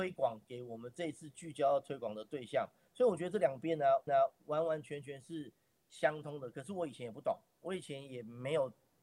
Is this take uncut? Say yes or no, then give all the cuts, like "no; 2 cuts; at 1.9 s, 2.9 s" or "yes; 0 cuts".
no; 1 cut; at 4.1 s